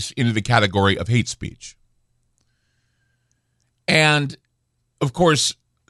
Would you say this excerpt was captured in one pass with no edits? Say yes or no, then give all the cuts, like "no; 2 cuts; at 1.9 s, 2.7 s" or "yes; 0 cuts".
yes; 0 cuts